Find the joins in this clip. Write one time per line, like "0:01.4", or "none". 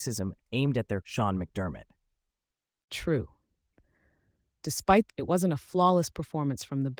0:01.0
0:05.1